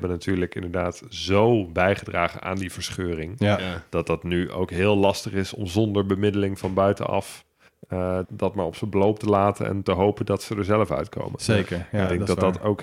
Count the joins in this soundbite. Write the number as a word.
one